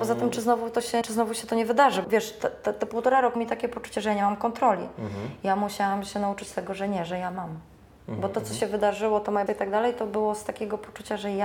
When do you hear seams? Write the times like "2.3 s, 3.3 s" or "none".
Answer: 1.0 s, 2.0 s, 3.4 s, 7.8 s, 9.5 s